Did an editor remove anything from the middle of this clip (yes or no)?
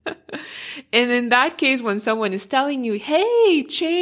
no